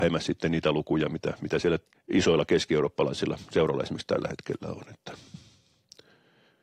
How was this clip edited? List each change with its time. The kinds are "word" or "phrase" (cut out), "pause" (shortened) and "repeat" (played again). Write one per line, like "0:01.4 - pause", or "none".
0:01.9 - pause